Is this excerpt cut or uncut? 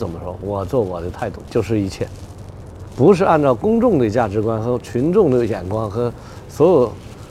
cut